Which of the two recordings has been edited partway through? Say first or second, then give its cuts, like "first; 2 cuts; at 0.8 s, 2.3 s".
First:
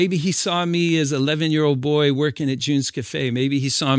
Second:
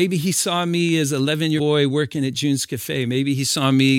second; 1 cut; at 1.6 s